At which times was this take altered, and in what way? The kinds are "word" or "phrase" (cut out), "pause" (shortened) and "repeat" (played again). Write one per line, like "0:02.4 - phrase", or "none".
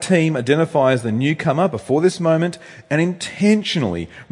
none